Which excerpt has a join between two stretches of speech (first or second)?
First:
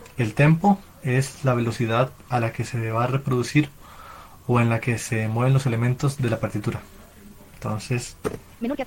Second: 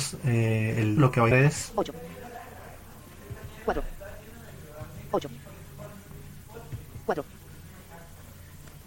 second